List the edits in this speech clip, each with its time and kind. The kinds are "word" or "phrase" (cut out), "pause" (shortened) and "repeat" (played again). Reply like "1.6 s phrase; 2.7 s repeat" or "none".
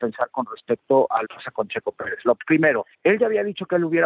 1.2 s phrase; 2.9 s pause

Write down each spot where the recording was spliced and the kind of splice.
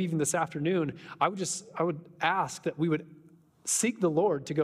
none

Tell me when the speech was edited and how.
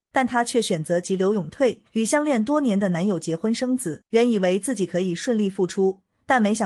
1.9 s pause; 4.1 s pause

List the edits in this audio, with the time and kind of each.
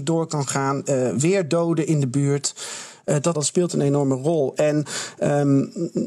3.3 s word

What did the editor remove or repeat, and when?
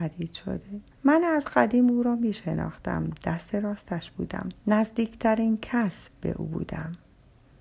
0.9 s pause; 4.6 s pause

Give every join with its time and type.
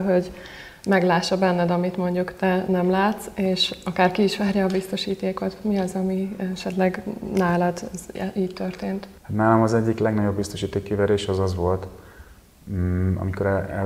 9.2 s pause

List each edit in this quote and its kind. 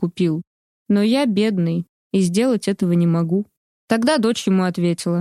3.6 s pause

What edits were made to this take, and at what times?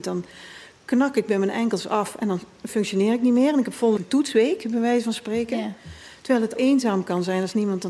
4.0 s word; 6.6 s phrase

